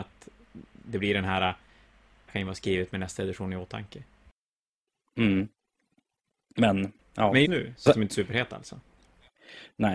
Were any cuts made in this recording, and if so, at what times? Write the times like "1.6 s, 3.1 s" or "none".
2.3 s, 7.4 s, 7.9 s